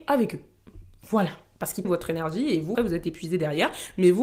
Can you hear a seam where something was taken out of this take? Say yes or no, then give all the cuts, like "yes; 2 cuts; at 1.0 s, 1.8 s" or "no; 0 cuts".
yes; 2 cuts; at 1.8 s, 2.7 s